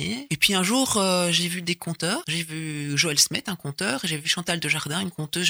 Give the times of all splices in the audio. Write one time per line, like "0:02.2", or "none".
none